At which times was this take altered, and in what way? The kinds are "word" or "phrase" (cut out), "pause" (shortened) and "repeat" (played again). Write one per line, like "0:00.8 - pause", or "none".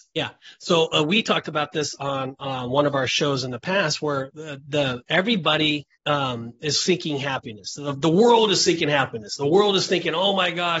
0:05.9 - pause